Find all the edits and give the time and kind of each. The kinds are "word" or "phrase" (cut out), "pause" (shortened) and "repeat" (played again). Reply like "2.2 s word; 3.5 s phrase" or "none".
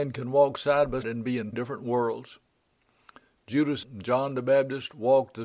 1.0 s word; 1.5 s word; 3.8 s word